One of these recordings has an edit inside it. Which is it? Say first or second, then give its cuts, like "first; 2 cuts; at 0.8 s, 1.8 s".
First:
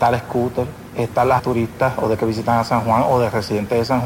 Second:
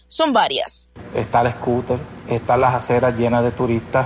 first; 2 cuts; at 1.4 s, 2.2 s